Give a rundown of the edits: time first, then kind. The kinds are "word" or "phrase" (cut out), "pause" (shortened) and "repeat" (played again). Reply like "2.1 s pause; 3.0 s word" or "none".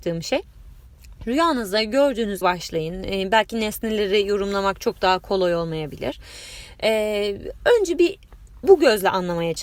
2.4 s phrase